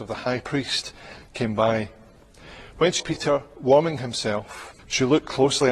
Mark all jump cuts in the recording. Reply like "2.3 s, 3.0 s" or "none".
3.0 s, 4.8 s